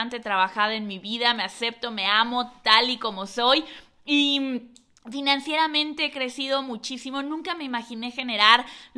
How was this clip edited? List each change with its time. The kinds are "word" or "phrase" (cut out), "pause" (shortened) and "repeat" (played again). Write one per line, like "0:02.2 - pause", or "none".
none